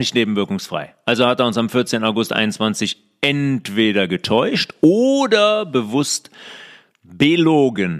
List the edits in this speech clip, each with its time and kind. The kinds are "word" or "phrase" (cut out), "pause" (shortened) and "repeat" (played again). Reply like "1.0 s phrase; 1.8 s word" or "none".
none